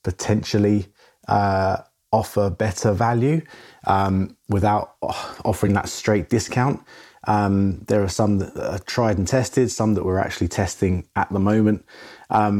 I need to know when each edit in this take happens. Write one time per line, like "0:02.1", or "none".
none